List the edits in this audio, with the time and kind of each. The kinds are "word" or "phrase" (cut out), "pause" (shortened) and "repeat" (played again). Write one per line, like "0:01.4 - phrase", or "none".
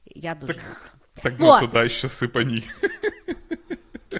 0:01.4 - word